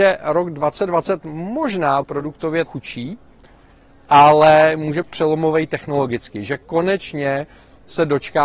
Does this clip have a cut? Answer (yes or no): yes